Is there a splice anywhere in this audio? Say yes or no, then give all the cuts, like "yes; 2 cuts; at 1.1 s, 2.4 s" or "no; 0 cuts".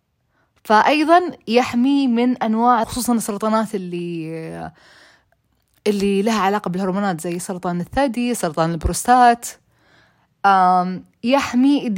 yes; 1 cut; at 2.8 s